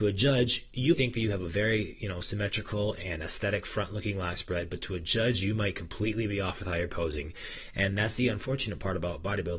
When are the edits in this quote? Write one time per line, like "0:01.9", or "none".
0:00.9